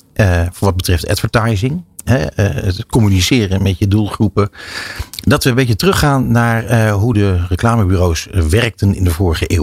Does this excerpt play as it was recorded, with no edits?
yes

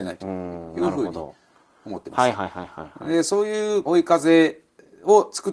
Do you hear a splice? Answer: yes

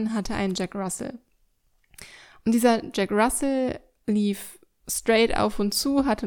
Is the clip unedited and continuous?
yes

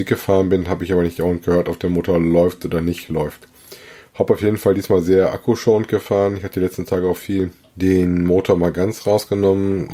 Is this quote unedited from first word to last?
yes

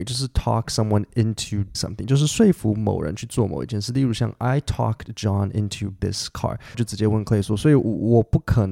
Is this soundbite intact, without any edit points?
no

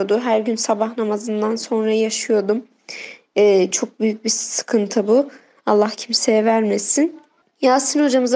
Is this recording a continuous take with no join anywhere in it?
yes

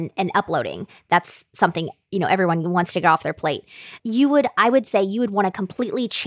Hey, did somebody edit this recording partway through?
yes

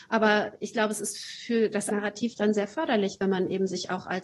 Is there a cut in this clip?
yes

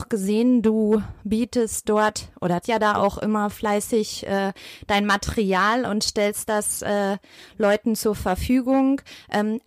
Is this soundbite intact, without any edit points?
no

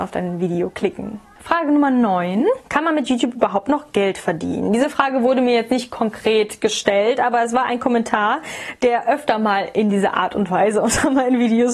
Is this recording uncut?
yes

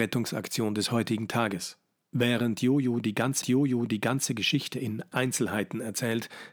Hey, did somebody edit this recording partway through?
yes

